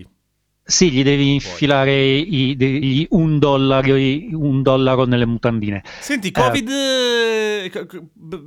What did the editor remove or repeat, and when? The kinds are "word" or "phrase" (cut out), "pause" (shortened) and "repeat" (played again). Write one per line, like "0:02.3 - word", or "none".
0:02.8 - word